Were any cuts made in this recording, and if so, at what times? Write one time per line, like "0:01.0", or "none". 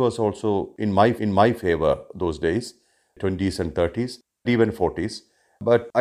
0:01.2
0:04.5